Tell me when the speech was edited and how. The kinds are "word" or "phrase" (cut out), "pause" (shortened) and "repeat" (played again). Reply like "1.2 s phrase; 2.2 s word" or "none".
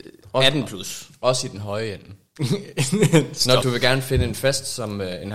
3.6 s word